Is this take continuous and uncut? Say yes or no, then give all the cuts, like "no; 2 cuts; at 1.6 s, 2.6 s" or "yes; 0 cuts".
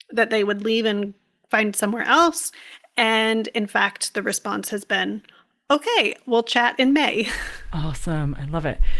yes; 0 cuts